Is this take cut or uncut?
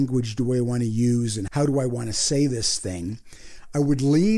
cut